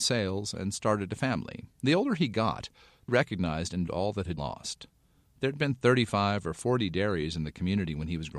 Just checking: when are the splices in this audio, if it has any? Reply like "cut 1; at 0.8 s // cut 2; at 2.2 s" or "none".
cut 1; at 1.7 s // cut 2; at 3.1 s // cut 3; at 3.9 s // cut 4; at 4.4 s